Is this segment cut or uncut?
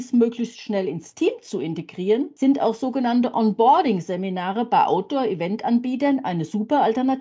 uncut